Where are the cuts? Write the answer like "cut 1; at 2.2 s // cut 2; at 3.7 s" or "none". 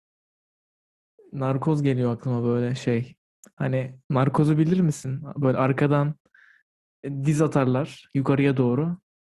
none